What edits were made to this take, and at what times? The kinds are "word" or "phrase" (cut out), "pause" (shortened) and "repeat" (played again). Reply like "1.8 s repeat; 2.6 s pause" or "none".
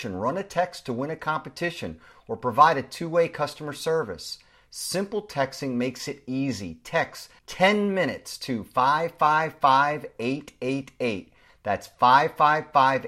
7.4 s pause